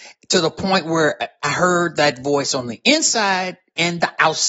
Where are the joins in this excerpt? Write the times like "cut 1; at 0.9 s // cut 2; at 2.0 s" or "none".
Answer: none